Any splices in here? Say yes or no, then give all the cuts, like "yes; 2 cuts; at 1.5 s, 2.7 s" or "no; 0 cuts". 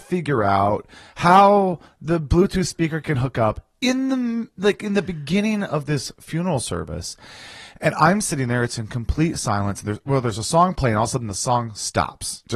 no; 0 cuts